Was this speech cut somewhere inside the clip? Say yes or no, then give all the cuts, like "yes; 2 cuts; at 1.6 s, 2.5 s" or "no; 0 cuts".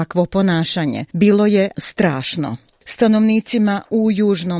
yes; 2 cuts; at 1.1 s, 1.7 s